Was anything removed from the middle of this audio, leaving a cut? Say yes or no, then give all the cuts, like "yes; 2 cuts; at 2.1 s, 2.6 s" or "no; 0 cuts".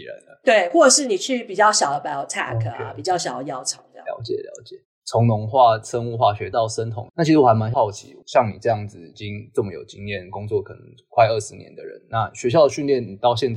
no; 0 cuts